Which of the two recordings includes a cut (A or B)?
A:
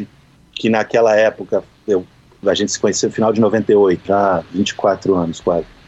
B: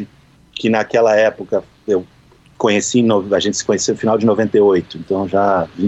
A